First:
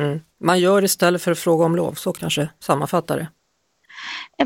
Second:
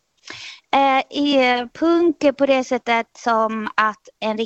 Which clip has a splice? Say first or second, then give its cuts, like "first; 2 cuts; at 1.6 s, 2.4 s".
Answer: first; 1 cut; at 2.2 s